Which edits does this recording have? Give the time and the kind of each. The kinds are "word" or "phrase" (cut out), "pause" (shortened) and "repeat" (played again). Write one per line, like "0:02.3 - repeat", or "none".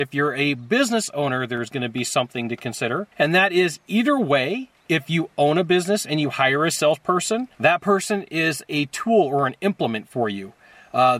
0:03.1 - pause
0:07.5 - pause